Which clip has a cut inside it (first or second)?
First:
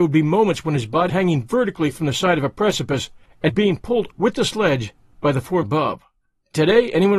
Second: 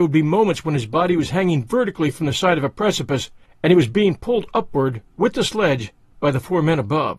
first